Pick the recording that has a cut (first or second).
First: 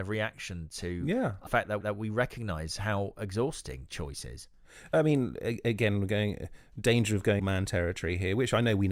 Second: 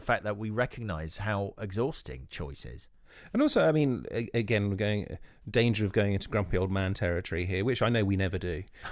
first